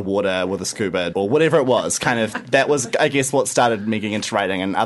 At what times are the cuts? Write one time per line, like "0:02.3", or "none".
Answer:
0:01.1